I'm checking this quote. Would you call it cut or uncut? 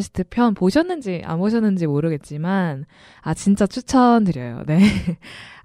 uncut